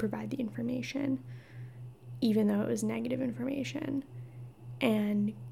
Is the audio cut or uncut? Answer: uncut